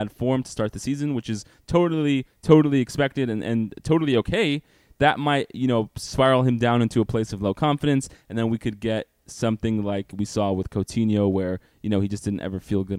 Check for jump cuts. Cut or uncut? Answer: uncut